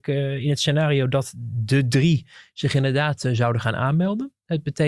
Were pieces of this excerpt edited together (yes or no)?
no